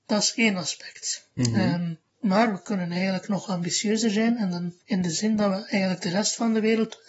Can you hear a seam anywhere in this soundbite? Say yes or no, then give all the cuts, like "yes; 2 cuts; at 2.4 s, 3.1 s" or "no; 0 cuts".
no; 0 cuts